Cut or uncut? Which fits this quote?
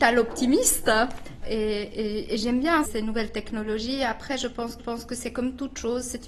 cut